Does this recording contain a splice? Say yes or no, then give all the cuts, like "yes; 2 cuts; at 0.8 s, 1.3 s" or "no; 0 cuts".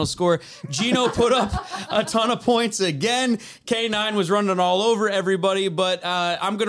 no; 0 cuts